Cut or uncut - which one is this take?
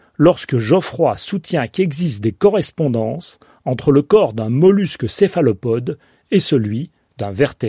uncut